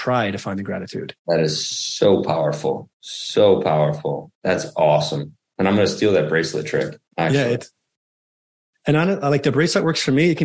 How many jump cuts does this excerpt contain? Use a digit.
4